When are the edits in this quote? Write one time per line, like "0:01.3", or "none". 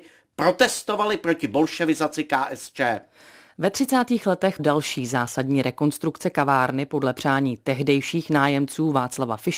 0:04.6